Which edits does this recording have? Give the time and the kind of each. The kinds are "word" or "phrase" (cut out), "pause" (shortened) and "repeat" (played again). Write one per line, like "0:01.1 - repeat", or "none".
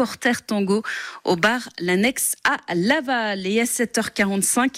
none